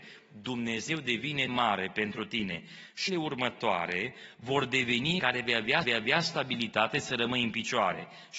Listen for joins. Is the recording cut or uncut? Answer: cut